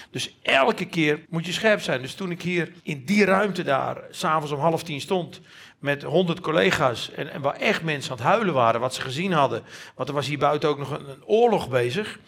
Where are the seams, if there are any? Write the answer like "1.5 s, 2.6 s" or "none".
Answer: 1.2 s, 2.8 s